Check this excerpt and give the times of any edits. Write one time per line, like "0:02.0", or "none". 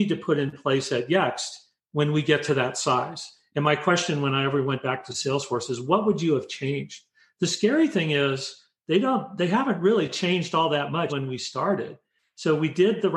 0:11.1